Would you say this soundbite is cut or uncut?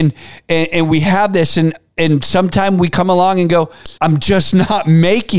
cut